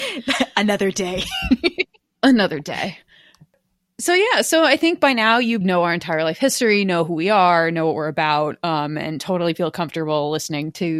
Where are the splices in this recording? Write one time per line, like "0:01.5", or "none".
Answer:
0:05.6